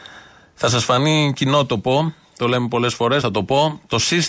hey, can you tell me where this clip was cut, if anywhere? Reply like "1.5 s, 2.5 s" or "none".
3.2 s